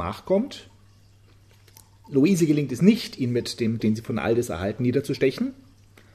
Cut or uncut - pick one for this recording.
cut